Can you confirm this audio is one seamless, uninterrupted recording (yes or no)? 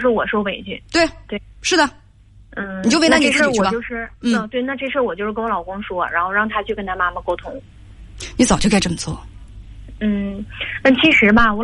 yes